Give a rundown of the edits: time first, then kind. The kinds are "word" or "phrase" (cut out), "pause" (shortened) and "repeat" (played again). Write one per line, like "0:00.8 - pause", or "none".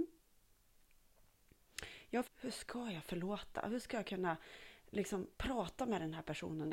0:02.2 - phrase
0:05.3 - pause